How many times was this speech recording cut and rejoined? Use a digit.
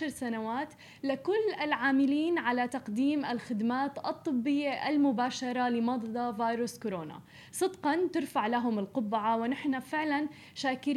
0